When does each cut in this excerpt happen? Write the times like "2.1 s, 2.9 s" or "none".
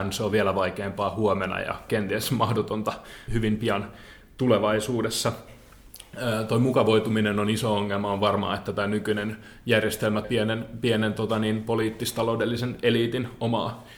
3.3 s, 10.2 s

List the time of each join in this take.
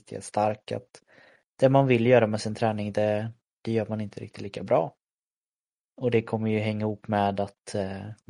none

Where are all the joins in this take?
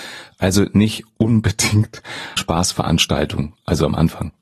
2.4 s

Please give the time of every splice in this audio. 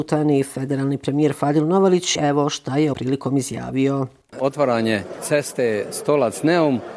2.2 s, 2.9 s

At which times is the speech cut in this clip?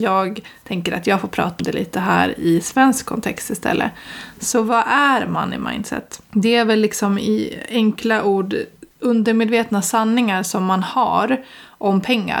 1.6 s, 6.3 s, 8.9 s

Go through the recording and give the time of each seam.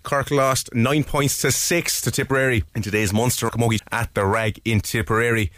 2.7 s, 3.5 s, 3.8 s

